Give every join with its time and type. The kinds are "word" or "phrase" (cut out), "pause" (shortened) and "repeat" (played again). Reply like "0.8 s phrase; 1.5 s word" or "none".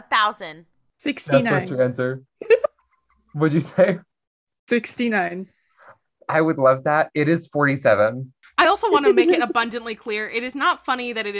none